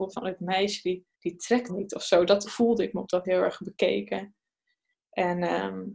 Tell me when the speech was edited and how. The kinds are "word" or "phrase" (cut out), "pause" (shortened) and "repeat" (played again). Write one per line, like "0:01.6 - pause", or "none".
0:01.1 - pause
0:01.7 - phrase
0:02.5 - word
0:03.2 - word